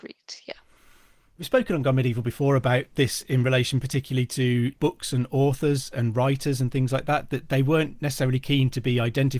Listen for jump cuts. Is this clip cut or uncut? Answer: uncut